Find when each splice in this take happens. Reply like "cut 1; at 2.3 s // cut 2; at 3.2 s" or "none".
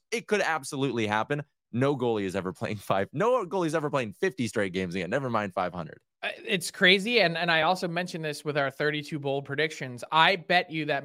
none